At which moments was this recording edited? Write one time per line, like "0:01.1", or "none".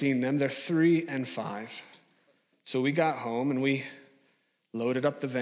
none